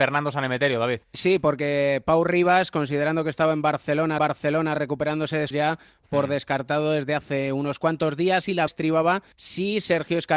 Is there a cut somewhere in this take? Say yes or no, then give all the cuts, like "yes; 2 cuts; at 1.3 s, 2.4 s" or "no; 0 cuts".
yes; 5 cuts; at 1.0 s, 4.2 s, 5.5 s, 8.7 s, 9.3 s